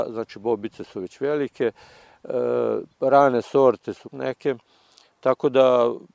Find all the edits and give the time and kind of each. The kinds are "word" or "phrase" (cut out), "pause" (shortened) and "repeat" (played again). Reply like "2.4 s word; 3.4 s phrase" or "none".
2.9 s pause; 4.0 s phrase